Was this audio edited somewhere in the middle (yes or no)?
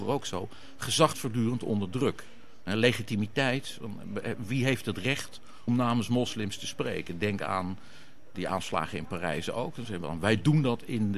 yes